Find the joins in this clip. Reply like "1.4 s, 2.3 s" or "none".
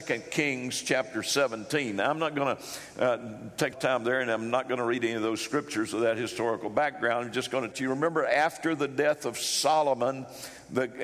3.7 s, 7.7 s